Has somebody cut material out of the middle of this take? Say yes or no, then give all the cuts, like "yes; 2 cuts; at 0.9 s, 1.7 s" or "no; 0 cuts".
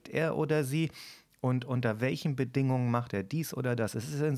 no; 0 cuts